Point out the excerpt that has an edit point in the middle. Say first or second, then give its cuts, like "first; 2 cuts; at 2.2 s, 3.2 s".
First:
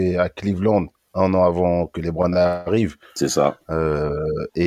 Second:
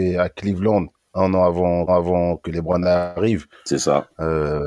second; 1 cut; at 1.9 s